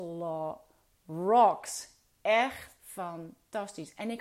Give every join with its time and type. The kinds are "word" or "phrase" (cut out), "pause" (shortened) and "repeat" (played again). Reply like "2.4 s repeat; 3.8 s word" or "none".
2.8 s phrase